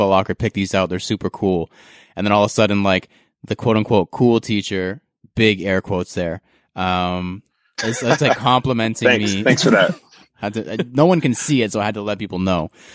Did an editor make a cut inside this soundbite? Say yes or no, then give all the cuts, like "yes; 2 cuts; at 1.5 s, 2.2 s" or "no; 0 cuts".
no; 0 cuts